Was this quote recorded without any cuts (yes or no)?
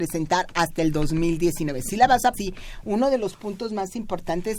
no